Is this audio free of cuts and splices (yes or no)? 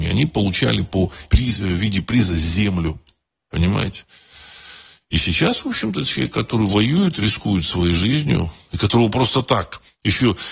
no